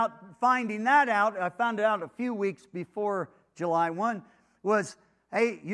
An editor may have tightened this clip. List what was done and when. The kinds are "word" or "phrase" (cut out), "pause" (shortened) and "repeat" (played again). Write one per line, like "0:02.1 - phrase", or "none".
none